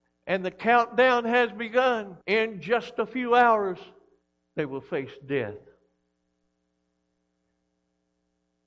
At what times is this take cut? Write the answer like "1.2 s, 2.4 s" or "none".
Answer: 2.2 s, 4.2 s